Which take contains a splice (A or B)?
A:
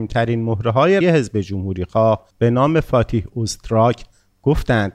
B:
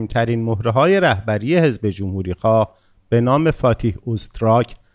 A